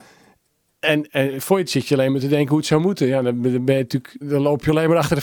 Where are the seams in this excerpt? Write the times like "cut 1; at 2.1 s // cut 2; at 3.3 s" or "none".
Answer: cut 1; at 1.1 s // cut 2; at 1.7 s // cut 3; at 4.2 s